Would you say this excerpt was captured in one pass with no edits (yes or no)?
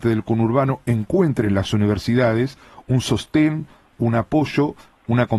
yes